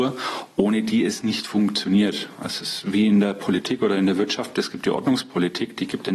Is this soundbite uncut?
yes; 0 cuts

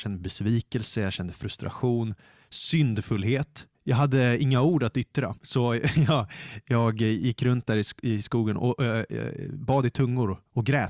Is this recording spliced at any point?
yes; 2 cuts; at 3.7 s, 5.4 s

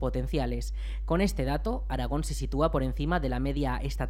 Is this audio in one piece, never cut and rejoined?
yes; 0 cuts

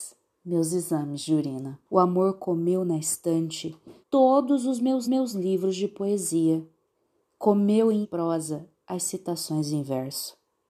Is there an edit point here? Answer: yes; 5 cuts; at 1.9 s, 4.0 s, 5.0 s, 6.9 s, 8.0 s

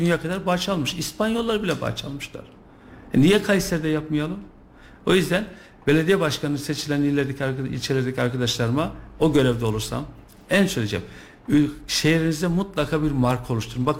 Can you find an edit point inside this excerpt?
no; 0 cuts

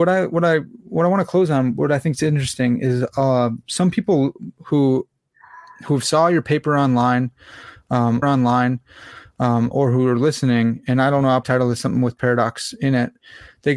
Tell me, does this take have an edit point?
yes; 2 cuts; at 8.2 s, 11.4 s

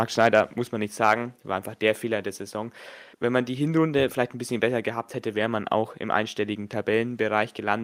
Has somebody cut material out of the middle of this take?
yes; 1 cut; at 3.1 s

